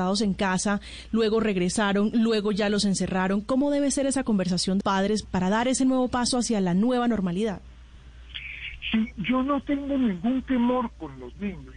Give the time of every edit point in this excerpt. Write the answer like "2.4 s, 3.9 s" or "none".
4.8 s, 5.2 s, 9.1 s